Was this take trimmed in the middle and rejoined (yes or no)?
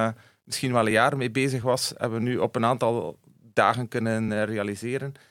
no